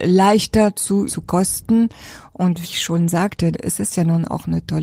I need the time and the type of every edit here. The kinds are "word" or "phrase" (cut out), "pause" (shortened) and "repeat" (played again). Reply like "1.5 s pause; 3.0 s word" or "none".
1.1 s word; 2.6 s word; 3.5 s word